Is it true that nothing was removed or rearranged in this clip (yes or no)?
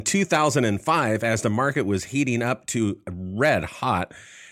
yes